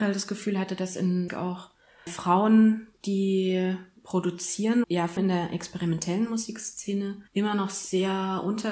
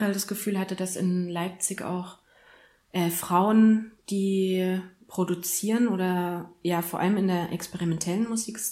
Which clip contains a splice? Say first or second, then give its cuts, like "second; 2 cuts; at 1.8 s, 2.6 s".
first; 5 cuts; at 1.3 s, 2.1 s, 4.8 s, 5.2 s, 7.3 s